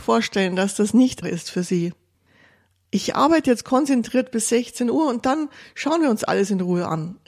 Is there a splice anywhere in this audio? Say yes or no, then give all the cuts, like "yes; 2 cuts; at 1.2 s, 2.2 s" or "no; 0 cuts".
yes; 1 cut; at 1.2 s